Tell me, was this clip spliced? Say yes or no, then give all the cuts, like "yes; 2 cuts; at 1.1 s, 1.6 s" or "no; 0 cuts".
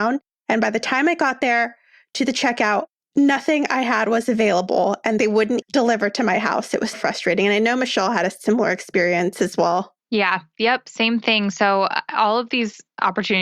yes; 3 cuts; at 5.6 s, 6.9 s, 10.0 s